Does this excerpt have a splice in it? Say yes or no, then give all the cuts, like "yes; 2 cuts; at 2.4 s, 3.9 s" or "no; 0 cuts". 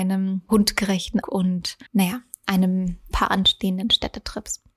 yes; 3 cuts; at 1.2 s, 1.9 s, 3.1 s